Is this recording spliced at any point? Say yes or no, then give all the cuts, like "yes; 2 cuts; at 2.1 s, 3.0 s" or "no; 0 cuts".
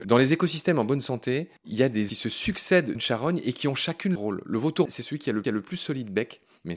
yes; 6 cuts; at 1.6 s, 2.1 s, 3.0 s, 4.2 s, 4.9 s, 5.4 s